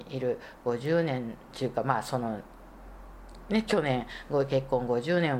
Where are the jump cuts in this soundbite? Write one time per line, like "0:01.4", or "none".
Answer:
0:01.4